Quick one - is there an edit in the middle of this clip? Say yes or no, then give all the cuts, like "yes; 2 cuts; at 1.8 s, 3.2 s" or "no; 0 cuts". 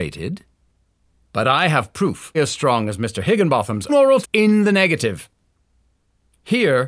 yes; 3 cuts; at 2.3 s, 3.9 s, 4.2 s